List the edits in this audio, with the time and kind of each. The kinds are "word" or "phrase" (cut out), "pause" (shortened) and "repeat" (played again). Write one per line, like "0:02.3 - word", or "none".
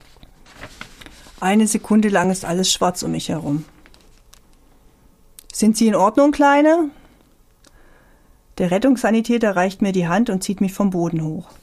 none